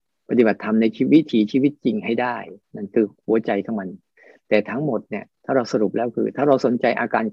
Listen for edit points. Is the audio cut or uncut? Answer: cut